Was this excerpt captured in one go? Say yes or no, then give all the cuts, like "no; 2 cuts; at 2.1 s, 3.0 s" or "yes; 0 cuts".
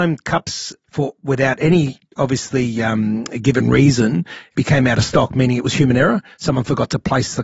yes; 0 cuts